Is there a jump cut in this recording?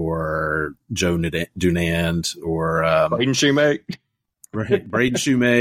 no; 0 cuts

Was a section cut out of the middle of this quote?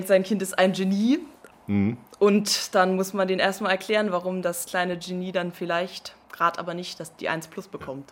yes; 2 cuts; at 1.5 s, 6.2 s

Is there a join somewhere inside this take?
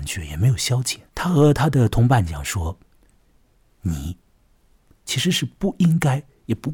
yes; 1 cut; at 1.1 s

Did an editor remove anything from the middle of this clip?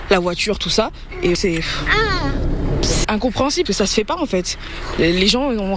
yes; 3 cuts; at 1.4 s, 3.0 s, 3.7 s

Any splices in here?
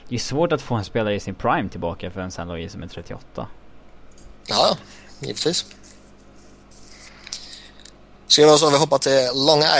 no; 0 cuts

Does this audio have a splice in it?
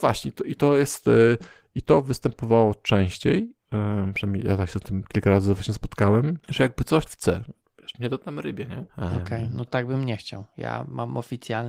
yes; 4 cuts; at 6.4 s, 7.1 s, 8.9 s, 9.7 s

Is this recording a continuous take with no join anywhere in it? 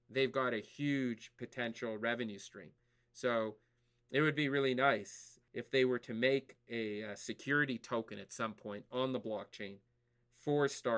yes; 0 cuts

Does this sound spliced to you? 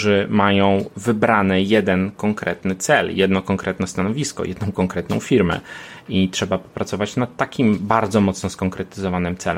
no; 0 cuts

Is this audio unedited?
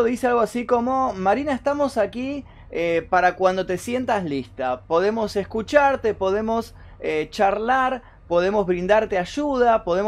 yes; 0 cuts

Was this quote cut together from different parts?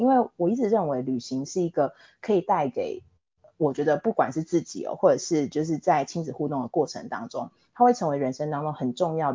no; 0 cuts

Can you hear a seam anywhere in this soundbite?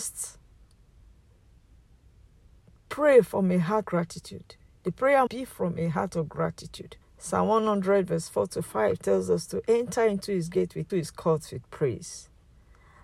yes; 5 cuts; at 3.9 s, 4.7 s, 5.3 s, 7.0 s, 10.9 s

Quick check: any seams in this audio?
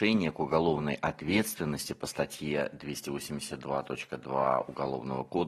no; 0 cuts

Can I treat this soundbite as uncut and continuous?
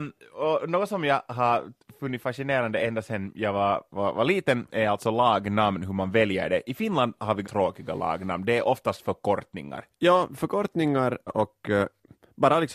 no; 2 cuts; at 7.4 s, 11.3 s

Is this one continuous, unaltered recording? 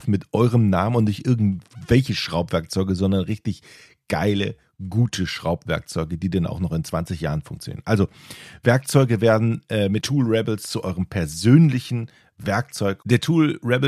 no; 1 cut; at 10.0 s

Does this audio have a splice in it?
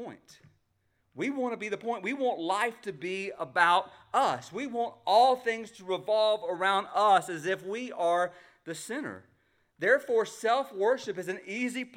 no; 0 cuts

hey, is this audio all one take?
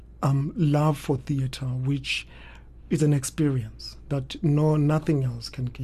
yes; 0 cuts

